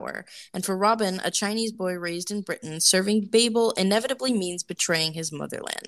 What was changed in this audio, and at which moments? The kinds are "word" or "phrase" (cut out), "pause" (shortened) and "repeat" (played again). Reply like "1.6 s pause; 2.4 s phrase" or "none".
none